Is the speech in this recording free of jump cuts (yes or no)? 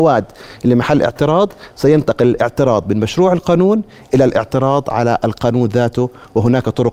yes